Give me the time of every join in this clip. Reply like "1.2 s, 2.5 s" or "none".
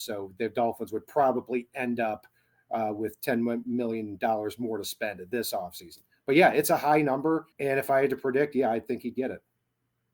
7.5 s